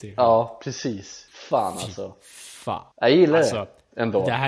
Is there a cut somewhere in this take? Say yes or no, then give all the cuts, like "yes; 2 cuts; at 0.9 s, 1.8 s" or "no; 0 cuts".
yes; 2 cuts; at 1.3 s, 2.9 s